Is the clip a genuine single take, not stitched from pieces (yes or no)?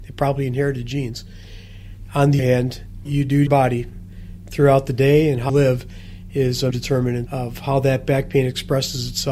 no